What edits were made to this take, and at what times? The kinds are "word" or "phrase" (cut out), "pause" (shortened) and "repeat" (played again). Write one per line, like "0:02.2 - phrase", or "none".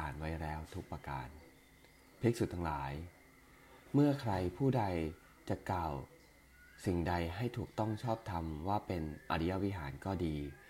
0:03.8 - pause